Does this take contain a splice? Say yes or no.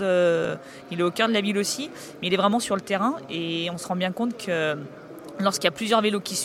no